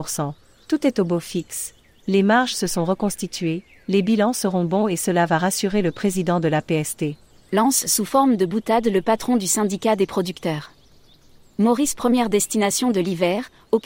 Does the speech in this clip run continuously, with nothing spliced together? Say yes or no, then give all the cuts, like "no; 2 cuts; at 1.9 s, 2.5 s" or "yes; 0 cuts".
yes; 0 cuts